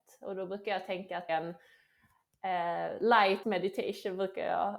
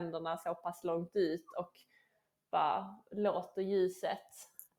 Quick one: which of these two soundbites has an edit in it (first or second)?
first